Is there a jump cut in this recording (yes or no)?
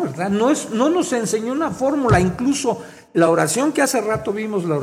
no